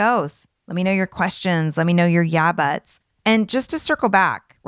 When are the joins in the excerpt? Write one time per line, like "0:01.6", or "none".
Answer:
none